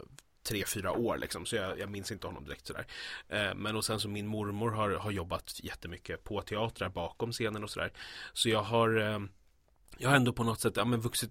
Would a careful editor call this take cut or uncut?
uncut